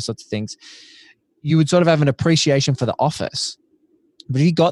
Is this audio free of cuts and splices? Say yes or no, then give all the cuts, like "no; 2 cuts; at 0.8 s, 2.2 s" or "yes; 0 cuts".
yes; 0 cuts